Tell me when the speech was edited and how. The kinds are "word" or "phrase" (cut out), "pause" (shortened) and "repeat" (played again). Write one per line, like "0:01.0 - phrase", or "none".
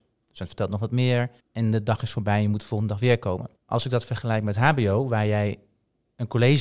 0:01.4 - pause
0:03.6 - pause